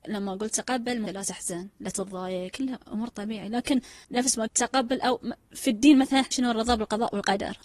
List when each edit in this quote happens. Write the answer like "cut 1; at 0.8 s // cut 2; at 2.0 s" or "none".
cut 1; at 1.1 s // cut 2; at 2.5 s // cut 3; at 4.0 s // cut 4; at 4.5 s // cut 5; at 5.5 s // cut 6; at 6.3 s